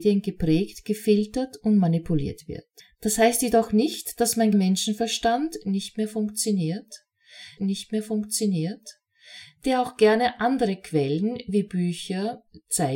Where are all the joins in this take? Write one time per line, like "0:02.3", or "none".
0:02.8
0:04.5
0:07.6